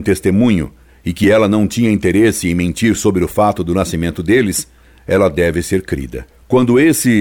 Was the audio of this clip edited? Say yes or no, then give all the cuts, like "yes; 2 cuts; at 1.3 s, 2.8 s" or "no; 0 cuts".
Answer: no; 0 cuts